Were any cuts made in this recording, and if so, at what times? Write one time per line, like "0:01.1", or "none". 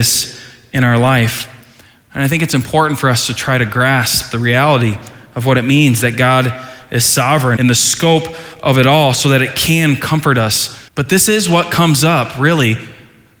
0:07.6
0:10.9